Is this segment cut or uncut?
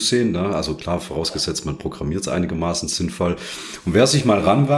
uncut